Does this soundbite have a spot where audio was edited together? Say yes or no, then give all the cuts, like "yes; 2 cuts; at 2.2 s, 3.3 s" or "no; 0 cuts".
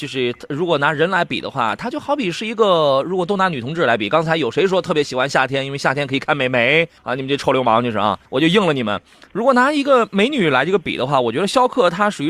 yes; 2 cuts; at 7.0 s, 8.2 s